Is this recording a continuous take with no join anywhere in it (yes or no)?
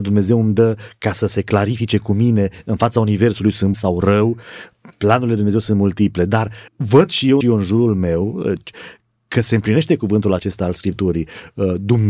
no